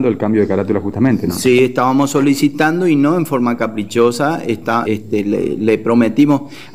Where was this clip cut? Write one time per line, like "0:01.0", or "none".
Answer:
0:04.9